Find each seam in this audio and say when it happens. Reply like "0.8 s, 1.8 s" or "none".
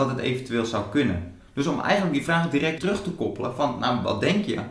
2.8 s